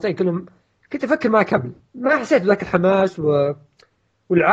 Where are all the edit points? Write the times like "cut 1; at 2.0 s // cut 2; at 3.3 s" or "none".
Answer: cut 1; at 1.9 s